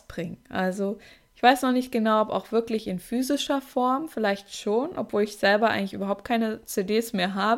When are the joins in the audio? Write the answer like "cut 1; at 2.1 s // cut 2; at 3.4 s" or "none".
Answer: none